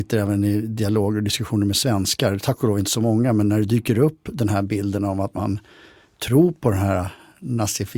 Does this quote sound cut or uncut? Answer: uncut